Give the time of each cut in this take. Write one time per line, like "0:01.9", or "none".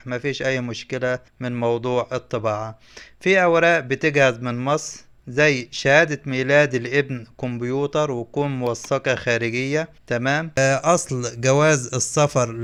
0:01.3
0:10.0